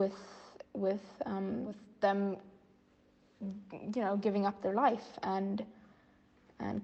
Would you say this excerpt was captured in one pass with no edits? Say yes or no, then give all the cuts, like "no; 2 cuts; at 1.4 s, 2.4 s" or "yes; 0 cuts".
yes; 0 cuts